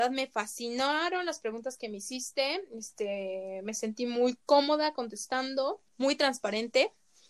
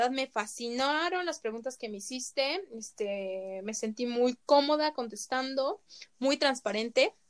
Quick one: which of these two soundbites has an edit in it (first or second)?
first